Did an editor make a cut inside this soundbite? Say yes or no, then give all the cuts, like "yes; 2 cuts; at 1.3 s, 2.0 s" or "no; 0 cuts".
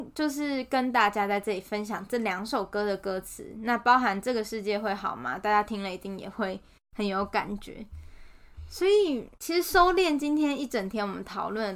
yes; 1 cut; at 9.3 s